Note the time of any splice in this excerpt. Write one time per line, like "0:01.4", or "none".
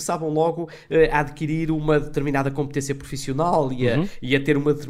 none